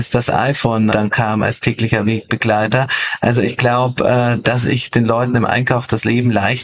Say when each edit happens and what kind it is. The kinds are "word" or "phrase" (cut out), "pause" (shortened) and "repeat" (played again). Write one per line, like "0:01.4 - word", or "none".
0:00.9 - word